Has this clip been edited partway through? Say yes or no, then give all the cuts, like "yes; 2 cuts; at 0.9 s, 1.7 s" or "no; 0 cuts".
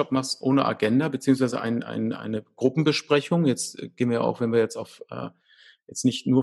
no; 0 cuts